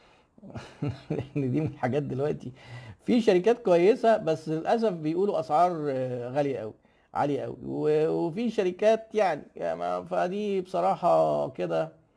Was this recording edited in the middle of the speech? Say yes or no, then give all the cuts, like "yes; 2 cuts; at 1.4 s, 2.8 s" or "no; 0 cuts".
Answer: no; 0 cuts